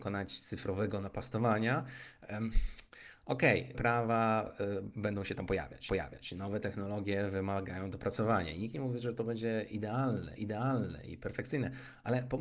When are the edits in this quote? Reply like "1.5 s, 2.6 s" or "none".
3.7 s, 5.9 s, 10.4 s